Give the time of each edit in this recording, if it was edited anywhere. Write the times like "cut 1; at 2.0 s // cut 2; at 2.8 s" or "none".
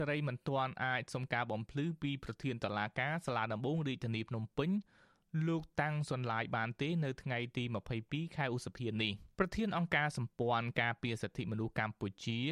cut 1; at 9.3 s